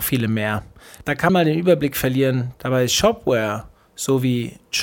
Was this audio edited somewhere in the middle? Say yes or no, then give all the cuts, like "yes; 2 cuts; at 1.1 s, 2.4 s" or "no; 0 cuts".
yes; 1 cut; at 1.3 s